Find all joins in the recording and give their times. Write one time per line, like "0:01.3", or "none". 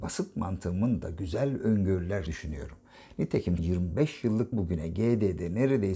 0:02.3
0:03.6
0:04.5